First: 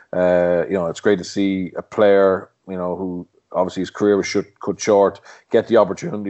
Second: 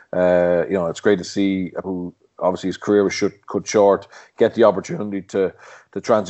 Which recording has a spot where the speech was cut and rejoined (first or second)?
second